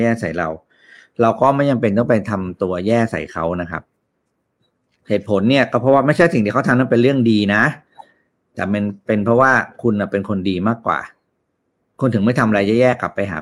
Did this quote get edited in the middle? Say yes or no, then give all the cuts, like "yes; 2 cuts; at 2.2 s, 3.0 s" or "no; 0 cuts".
no; 0 cuts